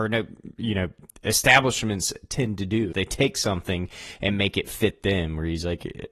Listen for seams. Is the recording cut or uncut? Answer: cut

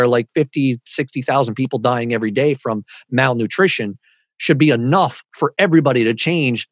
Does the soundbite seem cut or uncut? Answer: uncut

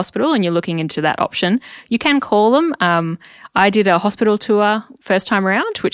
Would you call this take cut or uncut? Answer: uncut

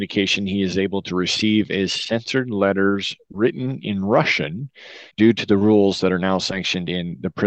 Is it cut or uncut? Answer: cut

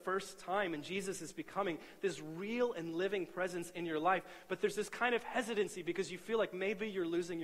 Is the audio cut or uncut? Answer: uncut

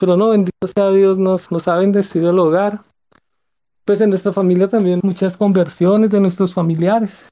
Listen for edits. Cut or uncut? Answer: cut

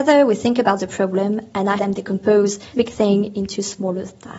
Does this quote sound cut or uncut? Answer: cut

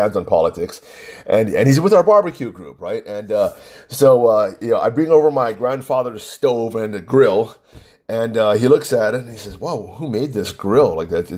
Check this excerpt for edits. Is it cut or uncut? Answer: uncut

